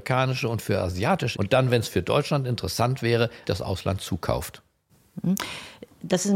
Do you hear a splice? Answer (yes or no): yes